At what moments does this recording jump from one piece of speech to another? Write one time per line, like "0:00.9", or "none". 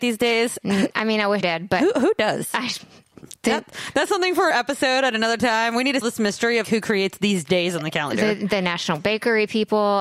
0:01.4
0:04.5
0:06.0
0:06.6